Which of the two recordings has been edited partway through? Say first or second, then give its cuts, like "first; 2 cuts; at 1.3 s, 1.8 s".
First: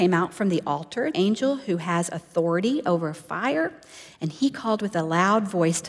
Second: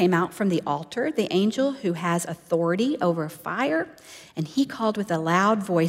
first; 1 cut; at 1.1 s